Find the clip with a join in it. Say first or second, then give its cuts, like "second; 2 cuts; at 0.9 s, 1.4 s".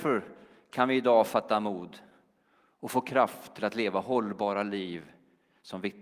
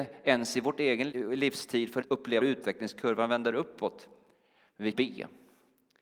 second; 4 cuts; at 1.1 s, 2.0 s, 2.4 s, 4.9 s